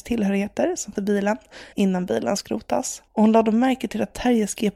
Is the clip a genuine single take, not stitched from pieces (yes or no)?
no